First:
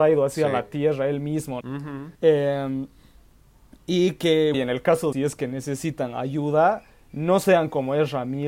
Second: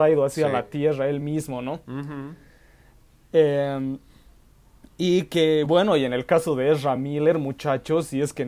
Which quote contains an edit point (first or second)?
first